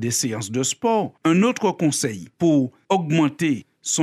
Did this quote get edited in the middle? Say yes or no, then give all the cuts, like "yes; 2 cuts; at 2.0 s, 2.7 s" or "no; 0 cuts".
yes; 2 cuts; at 1.2 s, 2.3 s